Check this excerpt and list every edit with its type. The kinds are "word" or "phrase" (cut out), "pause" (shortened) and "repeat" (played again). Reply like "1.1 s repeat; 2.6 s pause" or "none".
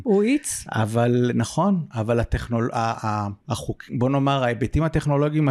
3.4 s pause